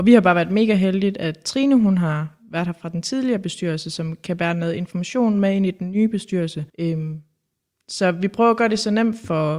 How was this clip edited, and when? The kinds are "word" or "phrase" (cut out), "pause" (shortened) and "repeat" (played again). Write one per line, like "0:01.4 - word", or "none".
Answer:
0:06.7 - pause